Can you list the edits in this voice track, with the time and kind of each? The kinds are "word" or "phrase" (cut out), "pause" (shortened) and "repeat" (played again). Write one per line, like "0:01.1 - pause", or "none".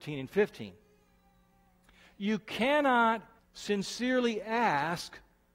0:03.4 - pause